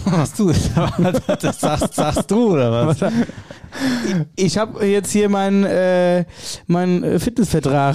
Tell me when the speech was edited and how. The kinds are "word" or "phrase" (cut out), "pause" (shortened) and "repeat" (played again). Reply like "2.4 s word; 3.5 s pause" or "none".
1.9 s repeat